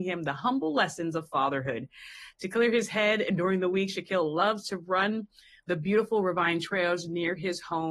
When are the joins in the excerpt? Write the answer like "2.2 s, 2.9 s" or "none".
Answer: none